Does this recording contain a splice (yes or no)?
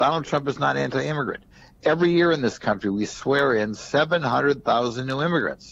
no